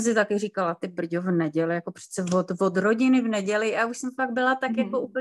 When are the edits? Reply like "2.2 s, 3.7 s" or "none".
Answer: none